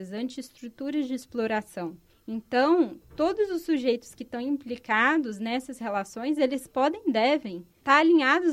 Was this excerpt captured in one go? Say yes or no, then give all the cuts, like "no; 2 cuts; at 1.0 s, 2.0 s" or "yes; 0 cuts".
no; 1 cut; at 3.0 s